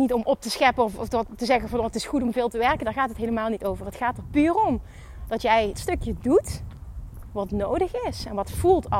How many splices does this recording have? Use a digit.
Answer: 1